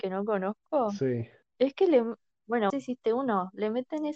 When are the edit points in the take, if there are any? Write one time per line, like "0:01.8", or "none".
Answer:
0:02.7